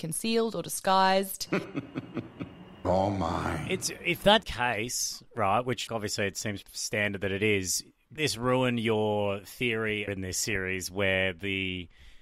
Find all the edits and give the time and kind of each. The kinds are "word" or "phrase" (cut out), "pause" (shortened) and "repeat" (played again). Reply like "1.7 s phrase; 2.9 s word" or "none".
2.8 s word; 4.4 s word; 5.9 s word; 6.6 s word; 8.2 s word; 10.1 s word